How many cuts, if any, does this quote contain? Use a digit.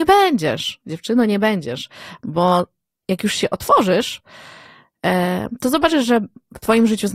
0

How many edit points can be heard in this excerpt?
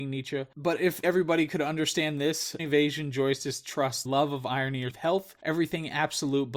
4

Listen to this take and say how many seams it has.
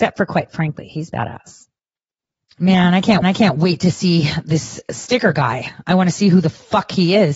2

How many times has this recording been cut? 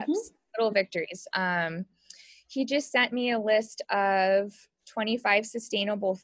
0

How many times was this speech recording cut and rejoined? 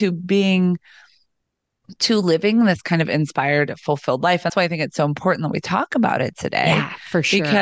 1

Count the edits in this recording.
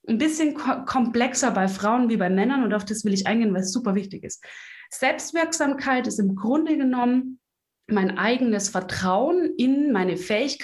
0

